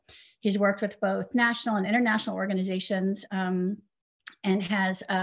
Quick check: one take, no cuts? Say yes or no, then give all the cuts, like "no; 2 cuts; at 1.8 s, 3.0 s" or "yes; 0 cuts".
yes; 0 cuts